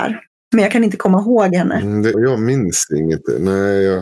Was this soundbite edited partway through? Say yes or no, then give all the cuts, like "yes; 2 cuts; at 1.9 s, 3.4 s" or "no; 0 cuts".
yes; 1 cut; at 2.1 s